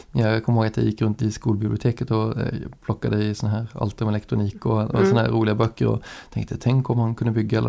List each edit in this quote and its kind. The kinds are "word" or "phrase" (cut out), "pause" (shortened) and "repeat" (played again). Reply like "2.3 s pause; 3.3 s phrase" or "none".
1.2 s word